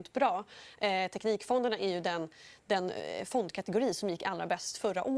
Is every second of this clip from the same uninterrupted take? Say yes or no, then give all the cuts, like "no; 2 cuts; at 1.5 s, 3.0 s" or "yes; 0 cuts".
yes; 0 cuts